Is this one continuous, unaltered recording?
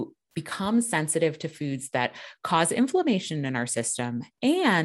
yes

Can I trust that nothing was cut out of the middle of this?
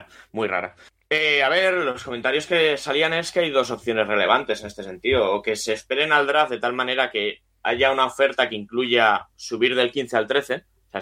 yes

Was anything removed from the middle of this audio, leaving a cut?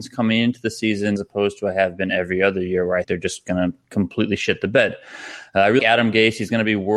yes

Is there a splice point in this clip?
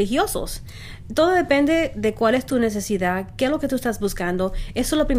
no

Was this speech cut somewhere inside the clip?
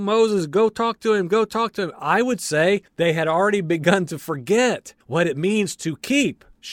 yes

